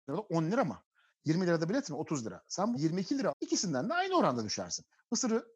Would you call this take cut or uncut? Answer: cut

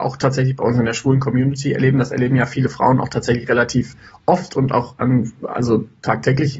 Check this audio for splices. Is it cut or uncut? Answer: uncut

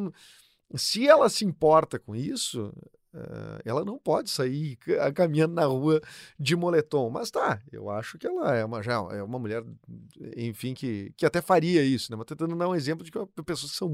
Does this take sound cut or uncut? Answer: uncut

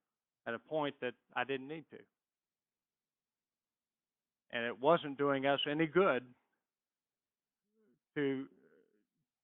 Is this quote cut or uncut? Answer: uncut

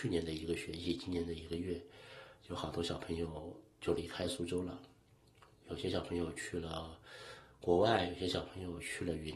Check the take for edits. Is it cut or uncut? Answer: uncut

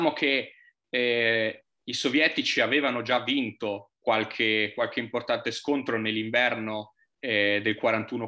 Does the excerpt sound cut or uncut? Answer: uncut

